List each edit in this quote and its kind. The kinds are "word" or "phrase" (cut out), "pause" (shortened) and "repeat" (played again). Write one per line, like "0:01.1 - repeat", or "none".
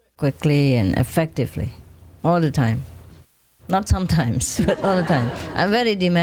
0:03.9 - word